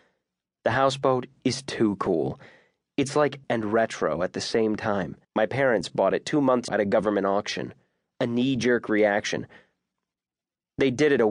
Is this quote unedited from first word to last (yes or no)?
no